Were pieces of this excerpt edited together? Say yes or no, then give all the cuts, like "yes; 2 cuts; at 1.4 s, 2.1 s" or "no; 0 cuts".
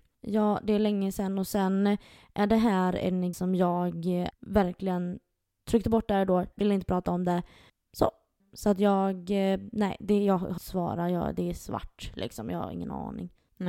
yes; 4 cuts; at 3.3 s, 4.3 s, 6.5 s, 10.6 s